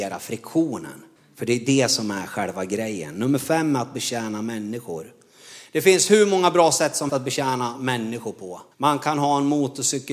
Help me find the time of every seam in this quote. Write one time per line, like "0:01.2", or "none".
0:01.2
0:07.1
0:08.7